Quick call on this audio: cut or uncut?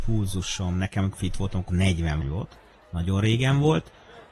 cut